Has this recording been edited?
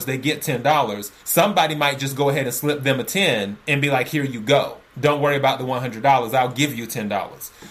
yes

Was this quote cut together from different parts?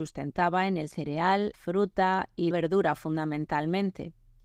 yes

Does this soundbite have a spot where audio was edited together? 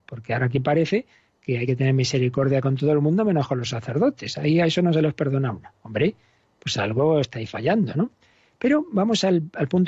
no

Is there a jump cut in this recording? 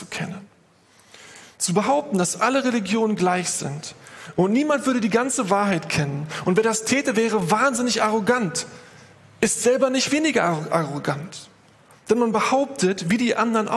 no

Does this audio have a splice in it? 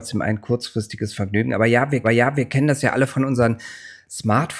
yes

